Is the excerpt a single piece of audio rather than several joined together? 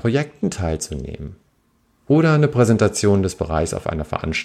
yes; 0 cuts

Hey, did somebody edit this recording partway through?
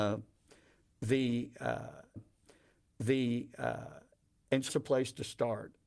yes; 2 cuts; at 2.2 s, 4.7 s

